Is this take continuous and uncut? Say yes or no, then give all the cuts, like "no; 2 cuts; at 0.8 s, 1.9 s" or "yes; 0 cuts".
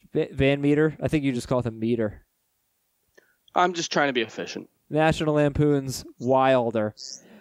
yes; 0 cuts